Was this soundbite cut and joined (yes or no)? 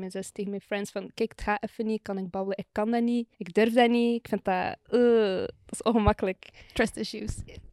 yes